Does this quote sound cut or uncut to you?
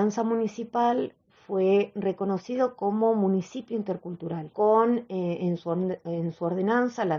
uncut